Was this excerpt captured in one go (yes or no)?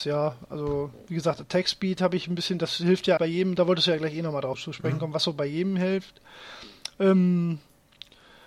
no